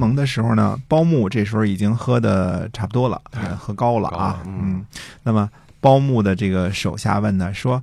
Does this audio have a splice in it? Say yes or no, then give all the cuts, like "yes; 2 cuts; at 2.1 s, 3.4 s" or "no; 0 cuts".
no; 0 cuts